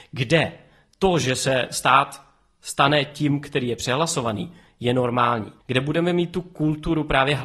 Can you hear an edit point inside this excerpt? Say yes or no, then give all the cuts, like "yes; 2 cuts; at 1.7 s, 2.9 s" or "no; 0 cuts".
yes; 1 cut; at 5.6 s